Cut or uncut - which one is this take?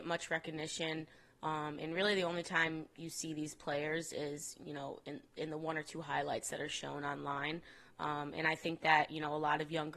uncut